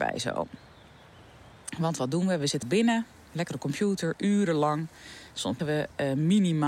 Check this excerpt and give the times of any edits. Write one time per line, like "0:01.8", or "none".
0:02.6
0:03.5
0:05.6

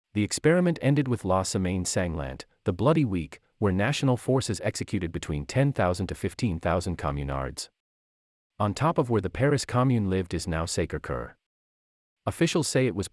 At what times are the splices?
none

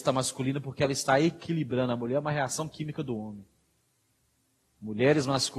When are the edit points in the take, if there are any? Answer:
none

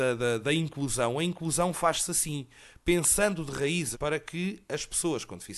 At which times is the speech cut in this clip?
0:03.9

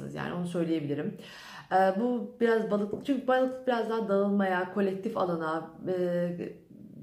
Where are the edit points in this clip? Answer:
none

